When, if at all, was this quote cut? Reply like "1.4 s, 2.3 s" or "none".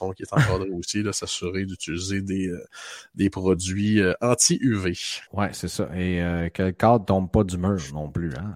5.3 s